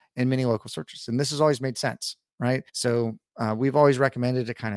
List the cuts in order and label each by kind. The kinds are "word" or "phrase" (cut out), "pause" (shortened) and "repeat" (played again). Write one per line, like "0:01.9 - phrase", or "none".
0:02.7 - pause